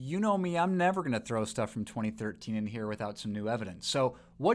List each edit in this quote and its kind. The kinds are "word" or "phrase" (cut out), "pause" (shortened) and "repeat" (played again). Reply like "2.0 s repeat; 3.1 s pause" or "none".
none